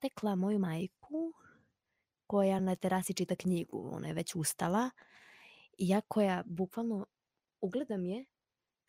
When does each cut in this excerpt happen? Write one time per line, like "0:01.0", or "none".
none